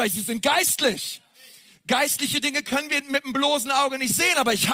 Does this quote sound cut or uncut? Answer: uncut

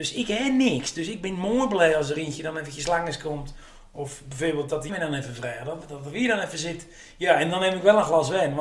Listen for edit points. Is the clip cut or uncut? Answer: cut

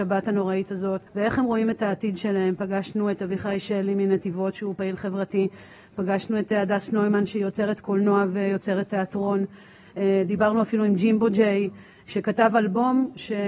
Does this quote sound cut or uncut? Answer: cut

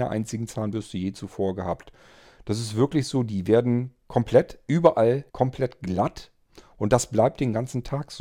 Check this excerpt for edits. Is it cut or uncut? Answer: cut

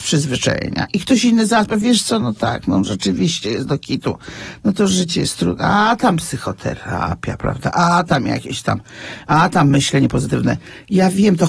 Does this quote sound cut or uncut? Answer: uncut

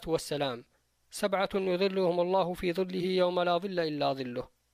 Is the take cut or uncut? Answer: uncut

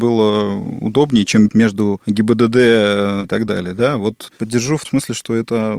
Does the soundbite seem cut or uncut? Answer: cut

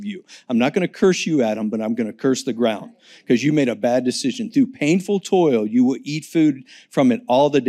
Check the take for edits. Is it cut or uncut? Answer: uncut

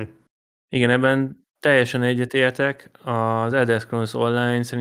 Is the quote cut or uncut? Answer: uncut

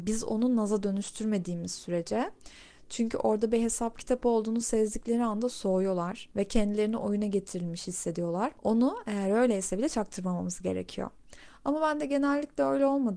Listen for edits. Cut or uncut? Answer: uncut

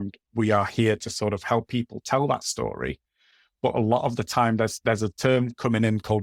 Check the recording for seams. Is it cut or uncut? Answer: uncut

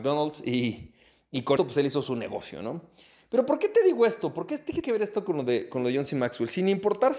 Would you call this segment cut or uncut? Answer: cut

